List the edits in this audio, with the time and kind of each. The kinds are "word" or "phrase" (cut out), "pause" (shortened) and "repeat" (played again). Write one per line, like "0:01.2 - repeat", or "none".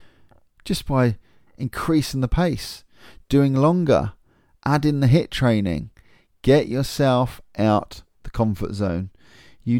none